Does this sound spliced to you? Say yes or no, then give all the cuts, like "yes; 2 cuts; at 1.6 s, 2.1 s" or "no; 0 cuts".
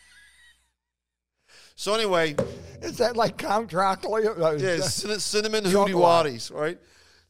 no; 0 cuts